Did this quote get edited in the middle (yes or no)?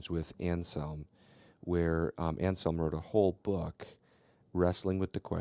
no